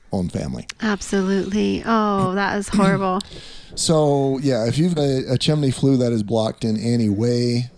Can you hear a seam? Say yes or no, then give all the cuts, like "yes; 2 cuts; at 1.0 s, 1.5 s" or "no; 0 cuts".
yes; 1 cut; at 5.0 s